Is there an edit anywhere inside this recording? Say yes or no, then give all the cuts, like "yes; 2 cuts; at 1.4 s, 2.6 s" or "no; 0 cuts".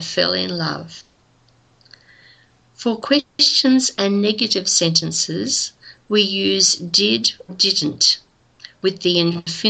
yes; 1 cut; at 7.5 s